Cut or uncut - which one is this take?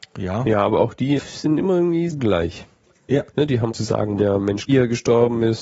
cut